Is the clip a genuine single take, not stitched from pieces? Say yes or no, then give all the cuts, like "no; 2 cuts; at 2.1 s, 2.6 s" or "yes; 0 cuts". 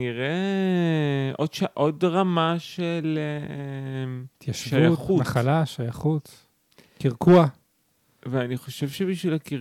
yes; 0 cuts